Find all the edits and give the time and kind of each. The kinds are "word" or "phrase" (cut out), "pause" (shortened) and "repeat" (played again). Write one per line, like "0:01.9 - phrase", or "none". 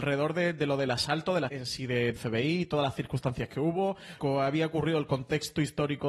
0:01.5 - word
0:02.2 - word
0:04.2 - word